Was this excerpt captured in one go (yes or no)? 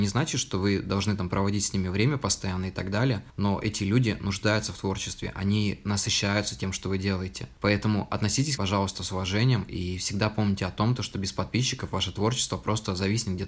no